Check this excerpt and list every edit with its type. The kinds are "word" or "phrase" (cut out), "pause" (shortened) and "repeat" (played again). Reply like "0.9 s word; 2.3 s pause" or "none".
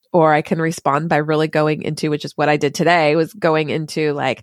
none